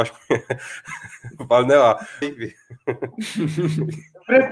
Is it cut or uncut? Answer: cut